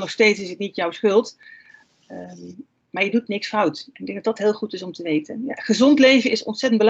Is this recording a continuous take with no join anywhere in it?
yes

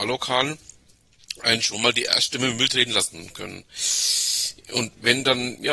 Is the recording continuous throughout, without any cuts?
yes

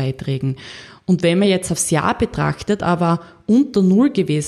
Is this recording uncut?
yes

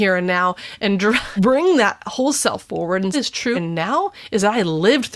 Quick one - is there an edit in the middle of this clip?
yes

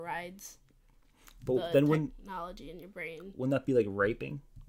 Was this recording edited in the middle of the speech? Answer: no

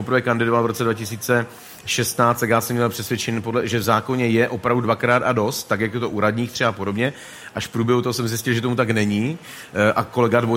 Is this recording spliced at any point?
no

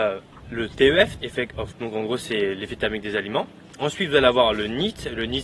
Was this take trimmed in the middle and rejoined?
yes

